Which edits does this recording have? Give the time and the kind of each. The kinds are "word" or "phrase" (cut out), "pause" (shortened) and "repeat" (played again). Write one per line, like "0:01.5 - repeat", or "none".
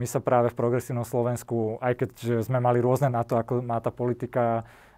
0:03.1 - word